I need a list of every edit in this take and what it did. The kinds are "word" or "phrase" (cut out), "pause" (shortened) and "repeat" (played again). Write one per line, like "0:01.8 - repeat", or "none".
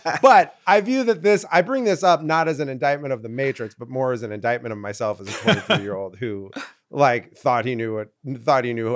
none